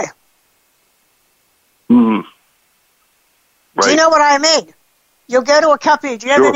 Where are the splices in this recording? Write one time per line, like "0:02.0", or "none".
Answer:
none